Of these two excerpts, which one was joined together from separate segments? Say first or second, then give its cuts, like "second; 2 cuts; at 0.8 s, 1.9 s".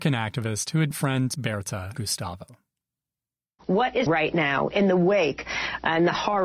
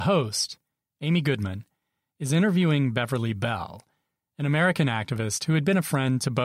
first; 4 cuts; at 0.9 s, 1.3 s, 2.0 s, 4.1 s